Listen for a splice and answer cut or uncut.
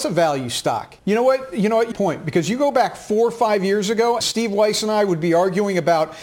cut